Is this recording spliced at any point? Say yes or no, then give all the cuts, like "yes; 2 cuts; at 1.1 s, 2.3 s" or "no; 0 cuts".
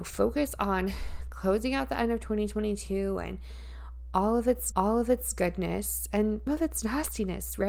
yes; 2 cuts; at 4.7 s, 6.5 s